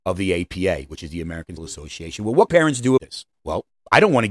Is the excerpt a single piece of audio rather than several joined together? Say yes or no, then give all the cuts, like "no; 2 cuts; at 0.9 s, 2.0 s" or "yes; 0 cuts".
no; 4 cuts; at 1.6 s, 2.5 s, 3.0 s, 3.3 s